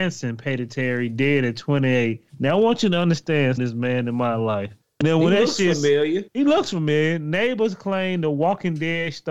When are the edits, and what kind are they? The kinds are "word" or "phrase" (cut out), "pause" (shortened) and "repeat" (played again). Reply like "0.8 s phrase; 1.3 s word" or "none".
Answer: 2.3 s pause; 3.6 s phrase; 4.8 s pause; 6.3 s pause